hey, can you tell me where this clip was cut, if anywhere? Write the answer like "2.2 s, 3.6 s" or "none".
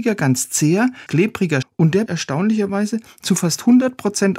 1.1 s, 1.6 s, 2.1 s